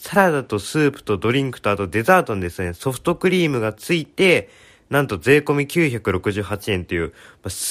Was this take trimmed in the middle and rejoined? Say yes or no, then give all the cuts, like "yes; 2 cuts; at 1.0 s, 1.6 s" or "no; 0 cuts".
no; 0 cuts